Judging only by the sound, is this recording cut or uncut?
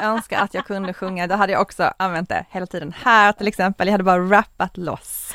uncut